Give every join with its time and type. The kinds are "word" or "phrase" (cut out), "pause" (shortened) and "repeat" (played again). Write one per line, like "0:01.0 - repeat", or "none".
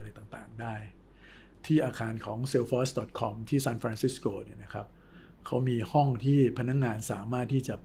none